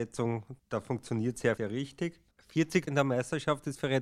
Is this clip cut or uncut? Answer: cut